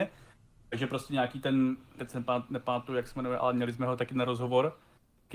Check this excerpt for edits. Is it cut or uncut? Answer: cut